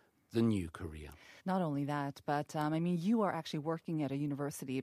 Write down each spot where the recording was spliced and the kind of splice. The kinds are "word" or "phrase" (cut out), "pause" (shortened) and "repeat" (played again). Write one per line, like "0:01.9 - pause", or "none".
0:01.4 - pause

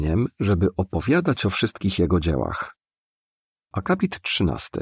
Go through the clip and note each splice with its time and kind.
none

